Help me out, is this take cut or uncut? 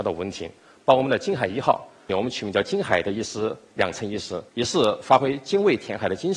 cut